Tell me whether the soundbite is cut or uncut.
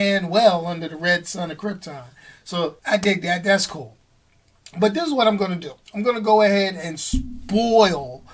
cut